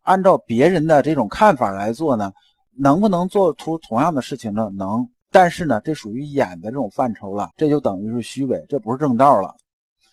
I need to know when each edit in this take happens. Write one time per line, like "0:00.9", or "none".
0:07.5